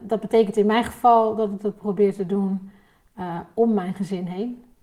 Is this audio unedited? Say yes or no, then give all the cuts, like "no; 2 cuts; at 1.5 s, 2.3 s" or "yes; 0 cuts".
yes; 0 cuts